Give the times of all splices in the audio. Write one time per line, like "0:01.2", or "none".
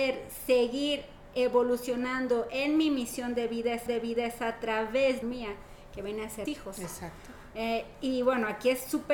0:03.9
0:05.2
0:06.5